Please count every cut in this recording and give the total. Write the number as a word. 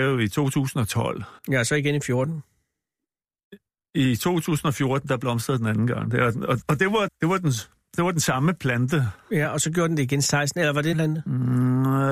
four